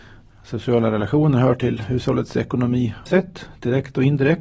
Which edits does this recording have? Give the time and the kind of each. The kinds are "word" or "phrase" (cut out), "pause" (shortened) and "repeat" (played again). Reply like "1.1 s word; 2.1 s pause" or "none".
3.1 s phrase